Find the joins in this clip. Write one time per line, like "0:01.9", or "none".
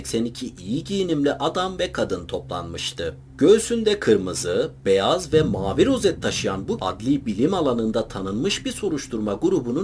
0:06.8